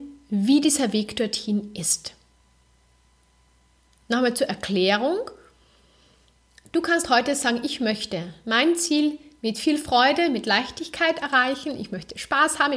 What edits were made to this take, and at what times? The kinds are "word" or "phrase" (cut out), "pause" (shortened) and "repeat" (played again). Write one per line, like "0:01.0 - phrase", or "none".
none